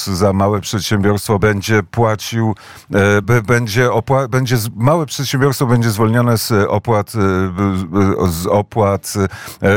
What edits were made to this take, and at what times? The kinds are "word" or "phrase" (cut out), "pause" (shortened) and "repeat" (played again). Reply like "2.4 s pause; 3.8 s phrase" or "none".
1.4 s word; 3.2 s word